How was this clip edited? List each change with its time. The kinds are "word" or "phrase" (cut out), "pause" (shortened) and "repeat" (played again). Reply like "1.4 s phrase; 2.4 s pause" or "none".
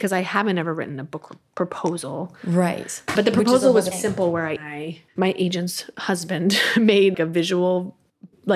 3.2 s word; 3.9 s word; 4.6 s phrase; 5.1 s pause; 7.1 s word